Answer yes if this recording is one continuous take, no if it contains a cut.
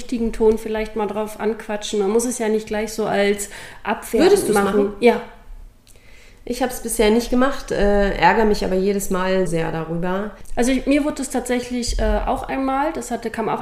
no